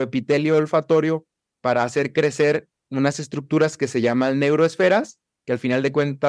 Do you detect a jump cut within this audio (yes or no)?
no